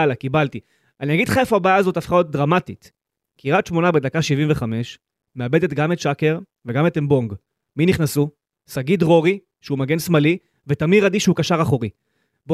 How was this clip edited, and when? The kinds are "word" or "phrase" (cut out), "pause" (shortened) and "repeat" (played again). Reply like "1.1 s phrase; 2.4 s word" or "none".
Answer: none